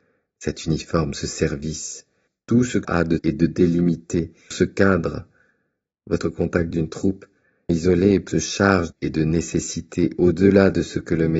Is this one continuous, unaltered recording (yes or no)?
no